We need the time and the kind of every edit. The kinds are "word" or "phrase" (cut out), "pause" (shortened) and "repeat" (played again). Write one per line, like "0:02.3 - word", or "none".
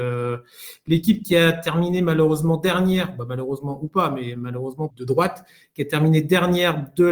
0:04.9 - phrase